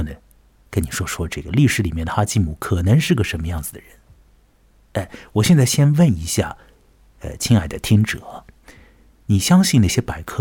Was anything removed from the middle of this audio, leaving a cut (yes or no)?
no